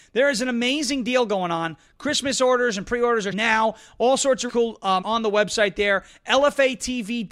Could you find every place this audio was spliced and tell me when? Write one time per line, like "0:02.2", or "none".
0:03.3
0:04.5
0:05.0